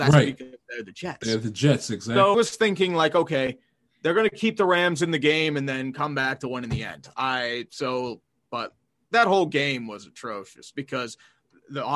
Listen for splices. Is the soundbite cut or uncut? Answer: cut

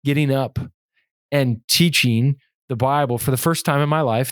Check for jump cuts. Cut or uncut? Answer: uncut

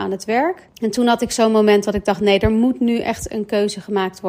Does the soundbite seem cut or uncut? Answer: uncut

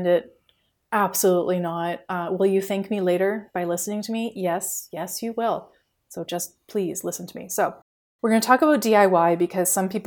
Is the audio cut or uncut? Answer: uncut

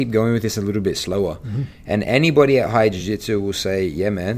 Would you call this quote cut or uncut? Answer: uncut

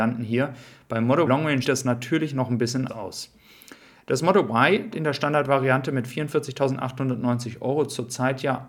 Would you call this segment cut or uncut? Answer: cut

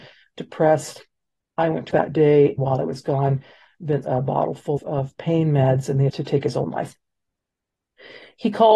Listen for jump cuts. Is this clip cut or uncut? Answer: cut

